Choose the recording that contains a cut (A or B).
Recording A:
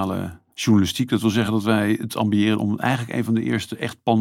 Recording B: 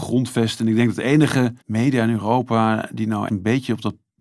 B